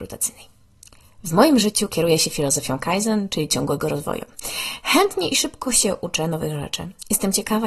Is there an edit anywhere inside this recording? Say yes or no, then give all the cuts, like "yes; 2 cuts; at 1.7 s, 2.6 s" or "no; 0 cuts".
no; 0 cuts